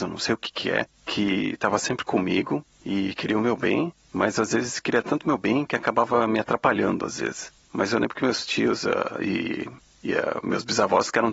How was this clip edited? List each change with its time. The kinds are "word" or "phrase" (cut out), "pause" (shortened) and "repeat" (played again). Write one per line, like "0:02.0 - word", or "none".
none